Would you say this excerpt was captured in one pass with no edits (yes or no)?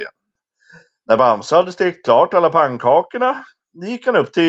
yes